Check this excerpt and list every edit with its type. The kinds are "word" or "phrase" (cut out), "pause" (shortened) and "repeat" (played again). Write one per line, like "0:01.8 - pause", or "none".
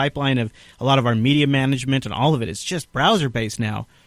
none